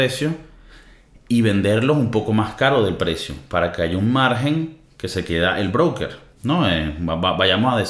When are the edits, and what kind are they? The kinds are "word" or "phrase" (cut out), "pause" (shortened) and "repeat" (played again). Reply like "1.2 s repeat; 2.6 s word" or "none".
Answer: 6.3 s pause